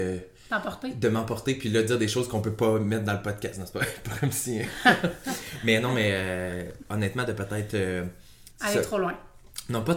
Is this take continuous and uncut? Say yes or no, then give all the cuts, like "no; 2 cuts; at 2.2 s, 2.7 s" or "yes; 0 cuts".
no; 1 cut; at 8.5 s